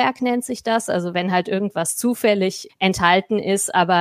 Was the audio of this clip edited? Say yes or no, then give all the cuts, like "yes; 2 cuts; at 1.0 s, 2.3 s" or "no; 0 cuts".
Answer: yes; 1 cut; at 2.7 s